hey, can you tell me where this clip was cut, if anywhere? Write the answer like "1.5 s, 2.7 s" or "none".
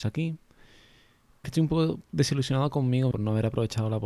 1.4 s, 3.1 s